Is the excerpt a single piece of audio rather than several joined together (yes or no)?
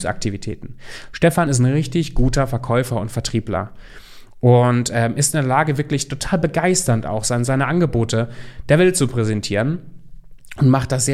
yes